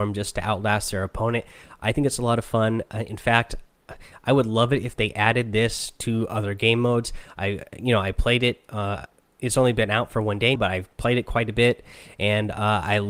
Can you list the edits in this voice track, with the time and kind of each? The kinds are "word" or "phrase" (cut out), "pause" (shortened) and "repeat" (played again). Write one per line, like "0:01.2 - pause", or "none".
0:10.6 - word